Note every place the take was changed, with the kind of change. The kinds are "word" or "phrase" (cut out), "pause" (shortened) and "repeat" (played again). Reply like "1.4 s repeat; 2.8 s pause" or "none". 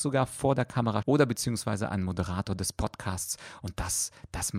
1.0 s word